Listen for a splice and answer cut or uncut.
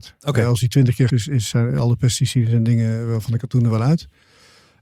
cut